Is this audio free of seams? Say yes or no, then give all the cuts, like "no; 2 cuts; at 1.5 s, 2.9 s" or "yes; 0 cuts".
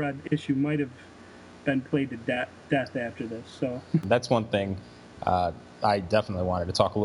yes; 0 cuts